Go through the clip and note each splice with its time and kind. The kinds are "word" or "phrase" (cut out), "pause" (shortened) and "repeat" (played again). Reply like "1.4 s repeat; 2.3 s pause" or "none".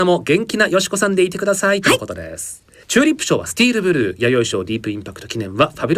2.8 s pause